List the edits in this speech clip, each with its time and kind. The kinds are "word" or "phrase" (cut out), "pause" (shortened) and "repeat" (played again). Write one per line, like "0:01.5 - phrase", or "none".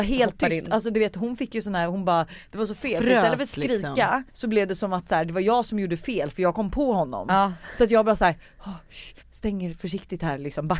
0:04.3 - pause
0:09.2 - pause